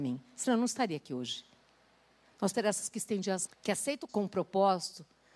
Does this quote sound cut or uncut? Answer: cut